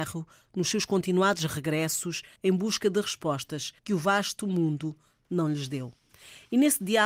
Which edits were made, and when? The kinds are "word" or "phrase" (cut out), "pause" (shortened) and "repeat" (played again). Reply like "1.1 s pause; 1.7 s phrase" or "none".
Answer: 2.4 s pause; 3.8 s pause